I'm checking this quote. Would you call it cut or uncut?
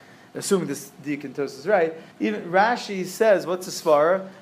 cut